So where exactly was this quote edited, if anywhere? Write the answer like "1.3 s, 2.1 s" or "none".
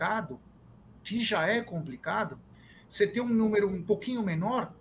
none